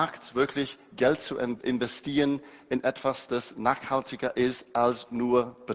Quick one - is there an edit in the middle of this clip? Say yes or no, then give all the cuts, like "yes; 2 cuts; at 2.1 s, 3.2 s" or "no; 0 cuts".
no; 0 cuts